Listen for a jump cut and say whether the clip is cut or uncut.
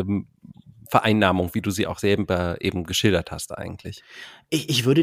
uncut